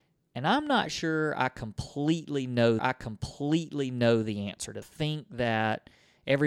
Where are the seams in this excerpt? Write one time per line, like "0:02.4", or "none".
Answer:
0:02.8
0:04.8